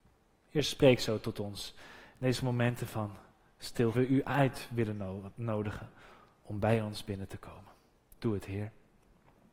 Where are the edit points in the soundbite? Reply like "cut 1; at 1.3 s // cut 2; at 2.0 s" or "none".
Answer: cut 1; at 3.9 s